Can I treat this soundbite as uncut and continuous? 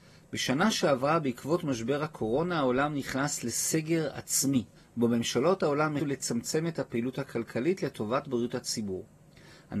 no; 2 cuts; at 4.7 s, 6.0 s

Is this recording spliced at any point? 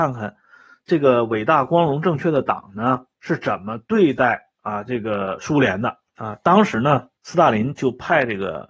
yes; 4 cuts; at 3.1 s, 4.6 s, 6.1 s, 7.2 s

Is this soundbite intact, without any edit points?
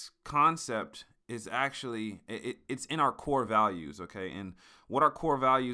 yes; 0 cuts

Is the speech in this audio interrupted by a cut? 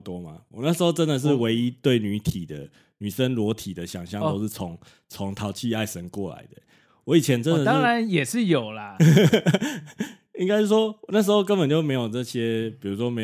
no; 0 cuts

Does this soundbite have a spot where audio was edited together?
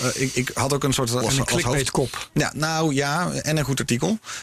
yes; 1 cut; at 1.2 s

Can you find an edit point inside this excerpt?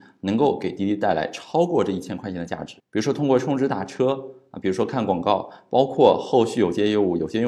yes; 1 cut; at 2.8 s

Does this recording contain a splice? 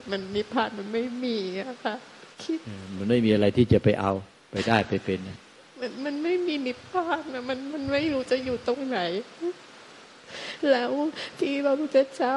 yes; 1 cut; at 2.3 s

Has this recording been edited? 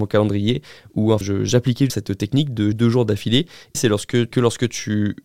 yes; 5 cuts; at 1.2 s, 1.9 s, 2.7 s, 3.7 s, 4.3 s

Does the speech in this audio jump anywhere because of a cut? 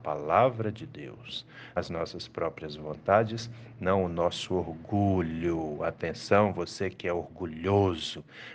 yes; 1 cut; at 1.8 s

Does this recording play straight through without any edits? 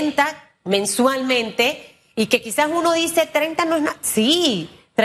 yes; 0 cuts

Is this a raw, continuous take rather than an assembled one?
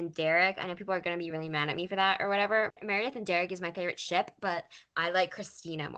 yes; 0 cuts

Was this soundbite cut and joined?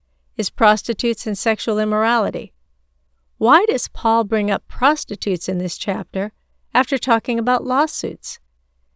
no; 0 cuts

